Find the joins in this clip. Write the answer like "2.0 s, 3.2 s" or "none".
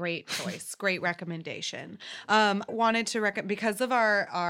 2.7 s